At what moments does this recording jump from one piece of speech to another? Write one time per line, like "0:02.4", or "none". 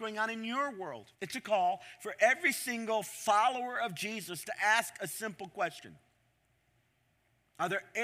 0:01.1